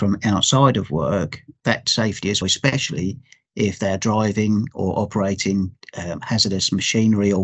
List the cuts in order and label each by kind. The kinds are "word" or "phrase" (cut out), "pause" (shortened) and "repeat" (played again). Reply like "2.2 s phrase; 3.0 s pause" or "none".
1.8 s phrase; 2.4 s word; 5.8 s pause